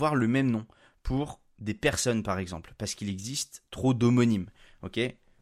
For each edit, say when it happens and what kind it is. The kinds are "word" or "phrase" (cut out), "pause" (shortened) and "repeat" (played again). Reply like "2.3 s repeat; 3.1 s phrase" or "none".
none